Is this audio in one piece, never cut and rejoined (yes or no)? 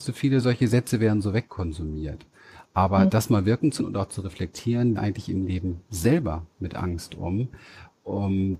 no